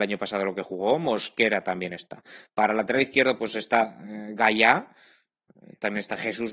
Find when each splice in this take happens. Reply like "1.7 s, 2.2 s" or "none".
none